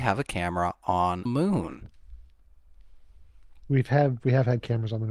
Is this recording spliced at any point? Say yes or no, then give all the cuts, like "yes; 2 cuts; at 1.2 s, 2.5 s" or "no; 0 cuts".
yes; 1 cut; at 1.3 s